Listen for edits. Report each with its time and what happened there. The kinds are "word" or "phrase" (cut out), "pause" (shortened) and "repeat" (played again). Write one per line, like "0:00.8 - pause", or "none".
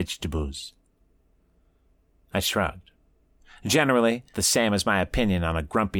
0:04.3 - word

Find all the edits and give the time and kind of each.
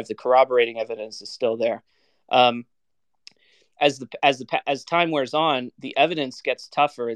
none

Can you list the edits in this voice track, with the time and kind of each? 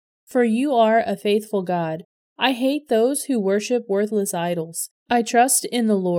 0:05.0 - pause

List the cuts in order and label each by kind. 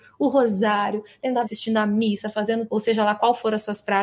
0:01.4 - word
0:02.7 - word

